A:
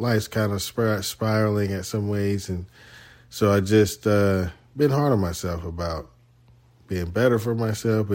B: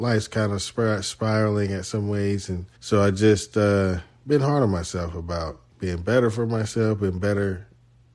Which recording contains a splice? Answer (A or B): B